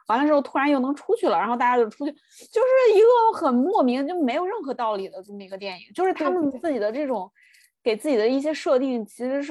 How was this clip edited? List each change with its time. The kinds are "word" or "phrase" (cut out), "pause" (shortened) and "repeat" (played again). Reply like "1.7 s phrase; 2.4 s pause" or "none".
none